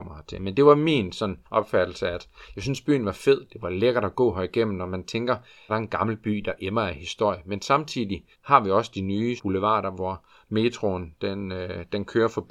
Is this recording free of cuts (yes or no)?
no